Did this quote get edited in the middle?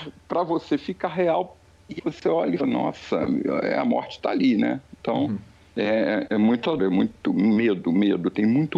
yes; 4 cuts; at 2.0 s, 2.6 s, 6.8 s, 7.2 s

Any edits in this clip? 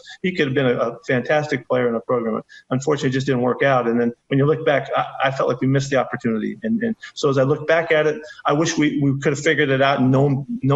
no; 0 cuts

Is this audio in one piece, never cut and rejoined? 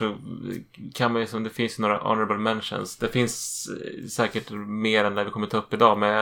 yes; 0 cuts

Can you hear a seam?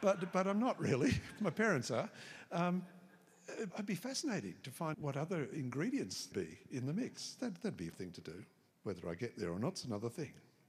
yes; 5 cuts; at 1.4 s, 3.7 s, 4.9 s, 6.3 s, 7.9 s

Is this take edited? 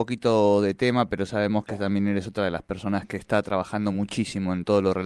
no; 0 cuts

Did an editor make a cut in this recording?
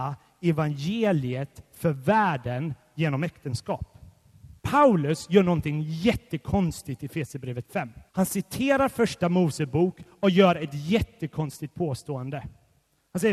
yes; 2 cuts; at 4.6 s, 8.1 s

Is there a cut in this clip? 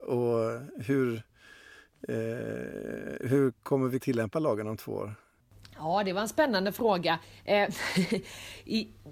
yes; 2 cuts; at 3.2 s, 4.0 s

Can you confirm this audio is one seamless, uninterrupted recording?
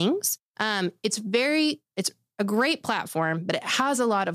yes; 0 cuts

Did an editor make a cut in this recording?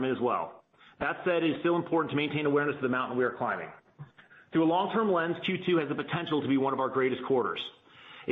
no; 0 cuts

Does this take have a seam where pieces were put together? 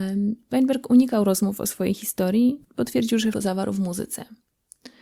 yes; 2 cuts; at 2.6 s, 3.3 s

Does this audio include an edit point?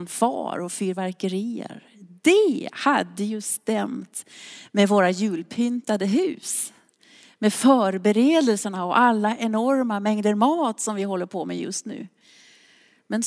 no; 0 cuts

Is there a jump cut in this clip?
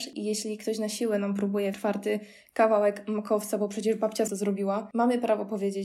yes; 2 cuts; at 1.7 s, 4.3 s

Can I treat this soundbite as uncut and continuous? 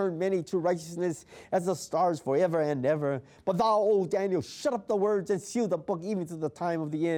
yes; 0 cuts

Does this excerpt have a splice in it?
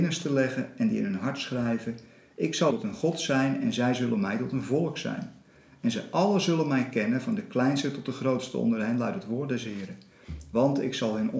yes; 1 cut; at 2.7 s

